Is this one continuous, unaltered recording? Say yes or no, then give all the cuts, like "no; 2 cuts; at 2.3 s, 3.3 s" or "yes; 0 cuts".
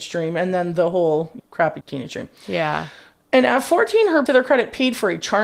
no; 3 cuts; at 1.4 s, 1.8 s, 4.3 s